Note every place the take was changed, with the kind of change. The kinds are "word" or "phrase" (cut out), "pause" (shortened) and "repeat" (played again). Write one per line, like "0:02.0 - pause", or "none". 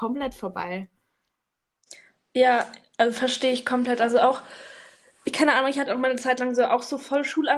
0:05.9 - word